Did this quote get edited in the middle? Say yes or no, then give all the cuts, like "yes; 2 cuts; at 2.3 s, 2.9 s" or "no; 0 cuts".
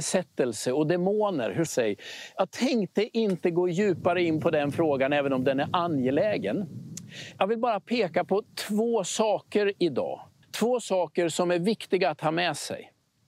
yes; 2 cuts; at 1.7 s, 10.4 s